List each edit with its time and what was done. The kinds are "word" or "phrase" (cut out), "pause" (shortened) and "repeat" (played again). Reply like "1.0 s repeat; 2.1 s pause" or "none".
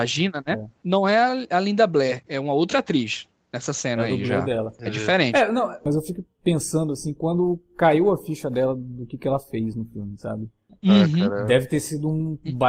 none